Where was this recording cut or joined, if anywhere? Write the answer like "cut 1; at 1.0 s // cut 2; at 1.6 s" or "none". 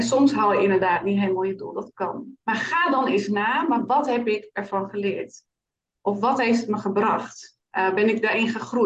cut 1; at 2.4 s // cut 2; at 7.7 s